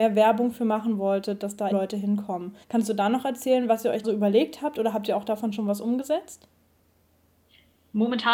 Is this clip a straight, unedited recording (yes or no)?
no